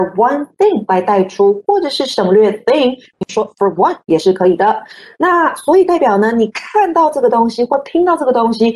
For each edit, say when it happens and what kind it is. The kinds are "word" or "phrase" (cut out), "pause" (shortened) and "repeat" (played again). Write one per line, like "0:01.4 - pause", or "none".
none

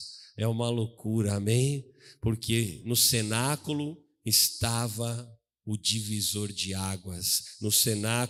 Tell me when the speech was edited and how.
none

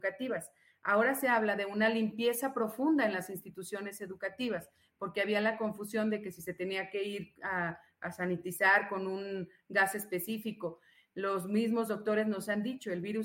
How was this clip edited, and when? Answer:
none

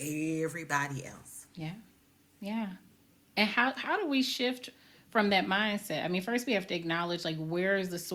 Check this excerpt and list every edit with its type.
0:03.8 - word

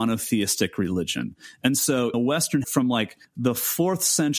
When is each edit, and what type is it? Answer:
0:02.1 - word
0:02.6 - word

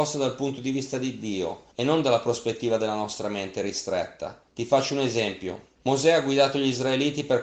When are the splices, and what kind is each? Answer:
0:01.7 - pause
0:04.5 - pause
0:05.7 - pause

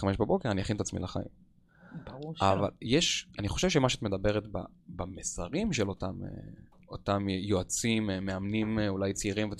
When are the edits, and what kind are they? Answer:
0:03.3 - word

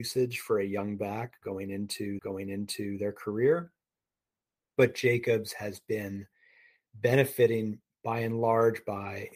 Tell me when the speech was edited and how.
0:02.2 - repeat

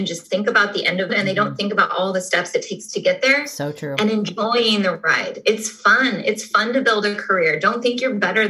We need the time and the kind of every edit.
0:01.1 - phrase

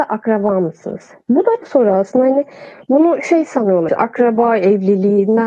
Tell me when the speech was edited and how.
0:01.6 - phrase
0:03.9 - word

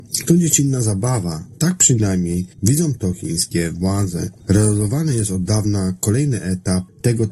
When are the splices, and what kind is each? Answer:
0:02.5 - pause

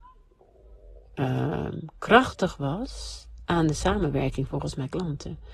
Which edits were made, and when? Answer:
none

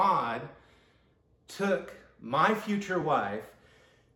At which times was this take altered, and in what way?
none

